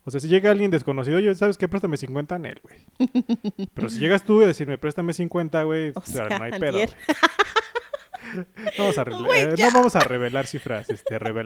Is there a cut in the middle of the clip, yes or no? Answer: yes